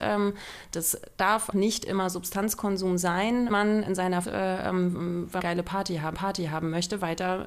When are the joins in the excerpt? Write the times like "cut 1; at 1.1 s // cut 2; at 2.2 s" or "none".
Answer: cut 1; at 1.5 s // cut 2; at 3.5 s // cut 3; at 3.9 s // cut 4; at 4.2 s // cut 5; at 5.4 s // cut 6; at 6.1 s